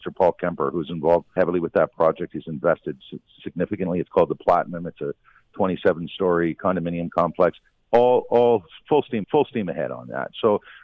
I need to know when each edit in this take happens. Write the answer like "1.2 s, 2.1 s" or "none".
1.4 s, 9.2 s